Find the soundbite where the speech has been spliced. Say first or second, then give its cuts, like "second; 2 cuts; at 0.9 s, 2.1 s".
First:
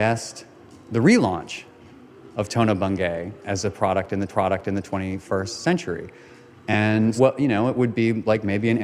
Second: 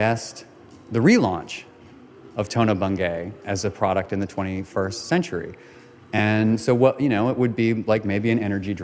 first; 2 cuts; at 4.3 s, 7.2 s